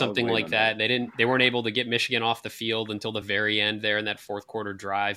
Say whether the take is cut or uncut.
uncut